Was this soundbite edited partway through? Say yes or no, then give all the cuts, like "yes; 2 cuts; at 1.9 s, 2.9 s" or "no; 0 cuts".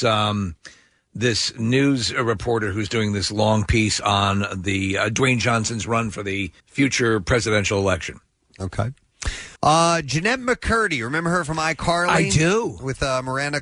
yes; 2 cuts; at 6.6 s, 9.6 s